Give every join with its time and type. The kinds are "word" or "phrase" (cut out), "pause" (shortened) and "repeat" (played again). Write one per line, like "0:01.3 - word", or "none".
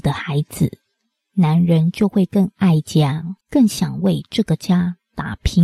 0:03.4 - pause

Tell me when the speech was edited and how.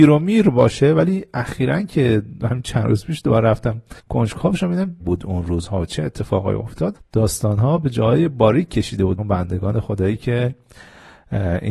0:04.0 - pause
0:05.0 - phrase
0:06.9 - word
0:09.2 - word

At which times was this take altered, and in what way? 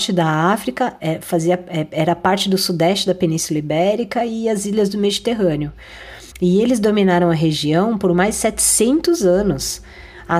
0:06.3 - pause

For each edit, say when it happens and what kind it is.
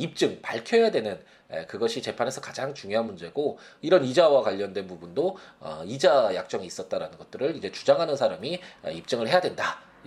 none

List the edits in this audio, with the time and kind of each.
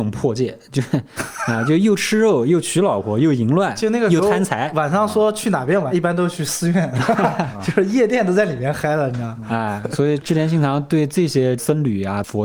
0:05.9 - word

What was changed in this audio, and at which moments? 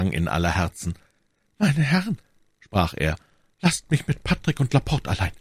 none

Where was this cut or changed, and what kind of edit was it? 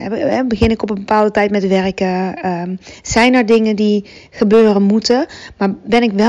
none

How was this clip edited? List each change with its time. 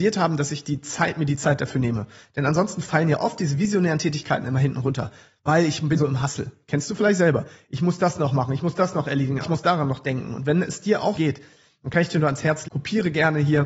0:06.0 - word
0:09.4 - word
0:11.1 - word
0:12.6 - word

